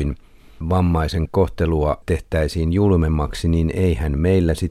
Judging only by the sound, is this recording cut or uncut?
uncut